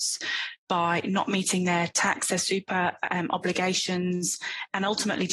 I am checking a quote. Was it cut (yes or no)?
no